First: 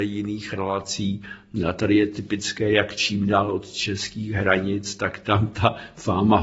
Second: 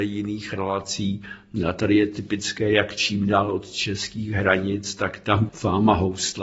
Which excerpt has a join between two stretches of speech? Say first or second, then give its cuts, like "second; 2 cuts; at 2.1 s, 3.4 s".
second; 1 cut; at 5.5 s